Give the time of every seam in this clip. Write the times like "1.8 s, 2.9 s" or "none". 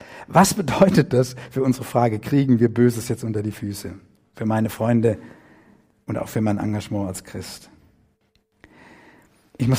none